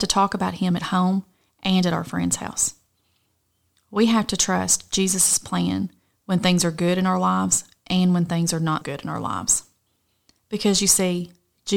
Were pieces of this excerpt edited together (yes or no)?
yes